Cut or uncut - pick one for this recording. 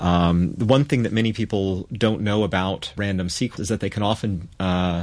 cut